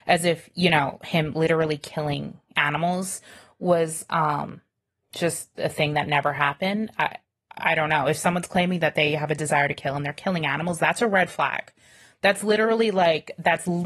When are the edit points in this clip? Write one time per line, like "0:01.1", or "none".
none